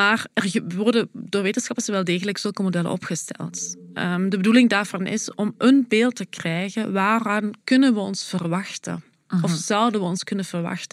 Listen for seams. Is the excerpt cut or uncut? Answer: uncut